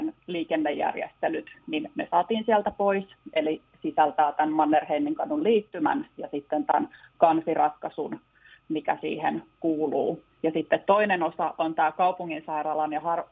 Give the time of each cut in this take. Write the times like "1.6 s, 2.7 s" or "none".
10.3 s